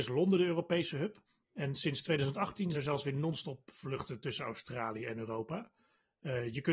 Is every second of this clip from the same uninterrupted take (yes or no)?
no